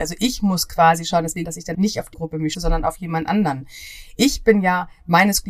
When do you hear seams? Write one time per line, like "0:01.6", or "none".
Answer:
0:01.4
0:01.7
0:02.1
0:02.5